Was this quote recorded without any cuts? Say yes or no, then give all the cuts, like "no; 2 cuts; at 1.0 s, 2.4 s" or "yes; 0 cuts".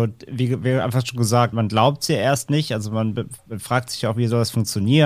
no; 1 cut; at 1.5 s